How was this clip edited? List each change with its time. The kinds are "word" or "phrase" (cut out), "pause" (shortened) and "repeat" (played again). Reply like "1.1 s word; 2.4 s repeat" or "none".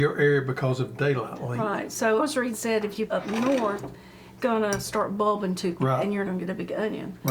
2.2 s word; 2.5 s word; 3.1 s phrase; 4.4 s word; 5.8 s word; 6.2 s word